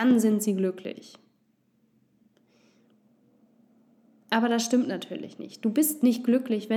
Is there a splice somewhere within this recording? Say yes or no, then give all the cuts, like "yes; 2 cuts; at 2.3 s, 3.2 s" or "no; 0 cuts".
no; 0 cuts